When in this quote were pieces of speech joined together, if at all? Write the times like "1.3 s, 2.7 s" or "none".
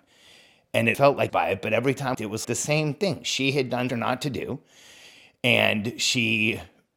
0.9 s, 1.3 s, 2.1 s, 2.4 s, 3.9 s